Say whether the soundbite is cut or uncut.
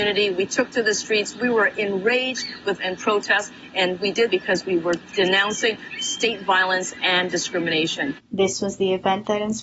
cut